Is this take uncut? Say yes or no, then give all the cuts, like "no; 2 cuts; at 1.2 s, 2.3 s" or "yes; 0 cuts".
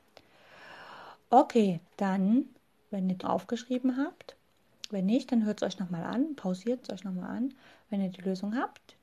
no; 3 cuts; at 1.9 s, 3.2 s, 6.8 s